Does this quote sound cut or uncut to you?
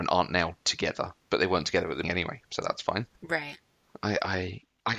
cut